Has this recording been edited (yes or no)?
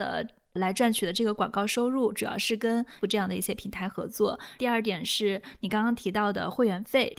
yes